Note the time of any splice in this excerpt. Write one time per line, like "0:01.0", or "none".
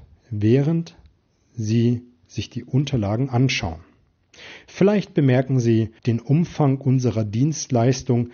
0:06.0